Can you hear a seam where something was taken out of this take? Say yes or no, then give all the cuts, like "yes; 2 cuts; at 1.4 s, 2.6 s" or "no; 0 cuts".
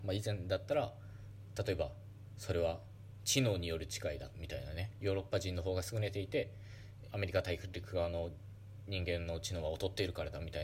yes; 1 cut; at 7.1 s